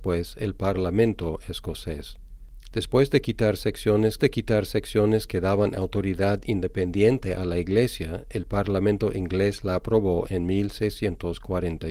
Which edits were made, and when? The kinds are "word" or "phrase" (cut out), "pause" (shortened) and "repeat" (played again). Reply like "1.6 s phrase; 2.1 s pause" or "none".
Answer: 4.2 s repeat